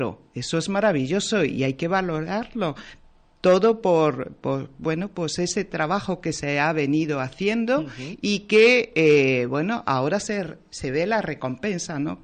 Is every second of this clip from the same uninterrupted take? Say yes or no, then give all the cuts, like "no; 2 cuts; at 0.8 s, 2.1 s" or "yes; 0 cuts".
yes; 0 cuts